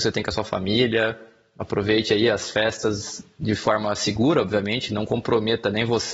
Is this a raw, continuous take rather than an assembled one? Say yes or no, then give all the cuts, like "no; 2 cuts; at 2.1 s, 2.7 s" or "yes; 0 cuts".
yes; 0 cuts